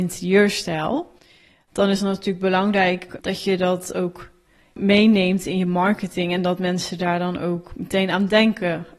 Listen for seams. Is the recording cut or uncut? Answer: uncut